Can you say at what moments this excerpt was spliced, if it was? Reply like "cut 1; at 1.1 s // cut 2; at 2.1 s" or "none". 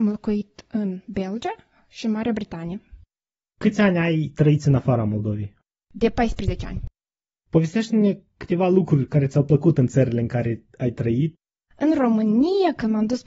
none